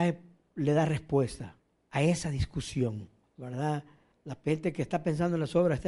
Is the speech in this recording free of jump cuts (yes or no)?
yes